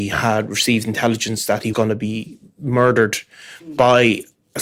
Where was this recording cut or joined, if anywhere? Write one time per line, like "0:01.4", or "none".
0:01.7

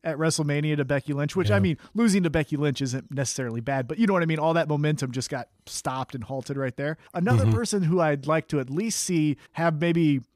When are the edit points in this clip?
0:07.1
0:09.5

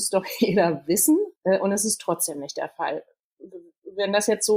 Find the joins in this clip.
0:01.4

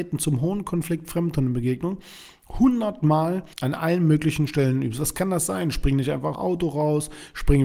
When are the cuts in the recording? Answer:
0:03.5
0:06.3

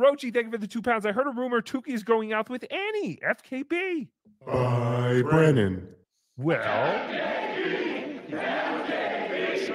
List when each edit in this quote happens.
none

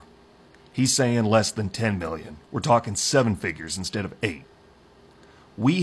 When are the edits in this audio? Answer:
none

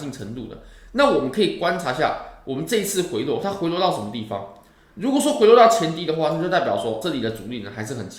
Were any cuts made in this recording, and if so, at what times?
0:07.0

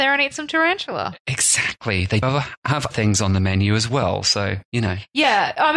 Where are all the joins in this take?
0:02.2
0:02.9

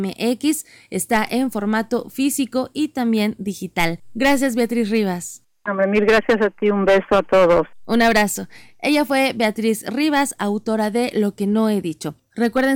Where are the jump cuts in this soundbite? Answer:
none

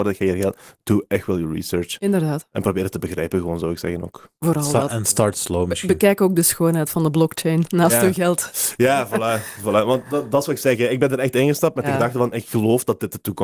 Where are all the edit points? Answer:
0:04.4

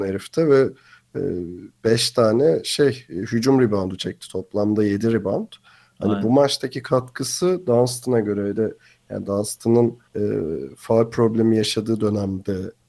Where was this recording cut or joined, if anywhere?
0:10.1

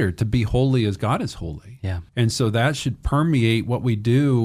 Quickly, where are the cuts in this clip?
0:02.1

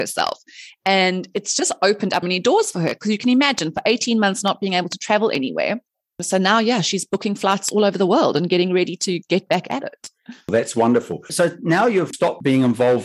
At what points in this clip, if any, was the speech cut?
0:02.2

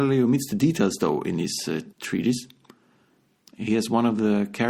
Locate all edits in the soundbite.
0:01.9

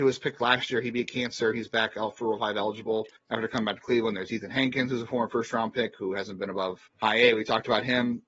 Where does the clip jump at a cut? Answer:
0:03.2
0:06.9

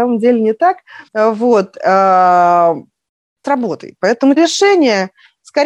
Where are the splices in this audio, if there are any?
0:01.1
0:03.4
0:04.4

